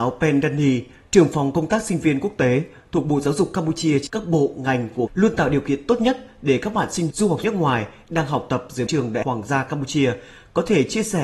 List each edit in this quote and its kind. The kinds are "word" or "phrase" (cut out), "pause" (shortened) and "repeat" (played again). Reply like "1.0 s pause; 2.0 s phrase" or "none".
4.1 s word; 5.1 s word; 7.1 s word; 7.4 s word; 8.9 s word; 9.2 s word